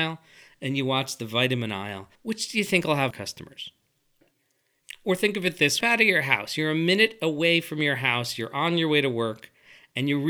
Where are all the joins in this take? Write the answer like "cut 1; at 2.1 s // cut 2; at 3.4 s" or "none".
cut 1; at 2.1 s // cut 2; at 3.1 s // cut 3; at 5.8 s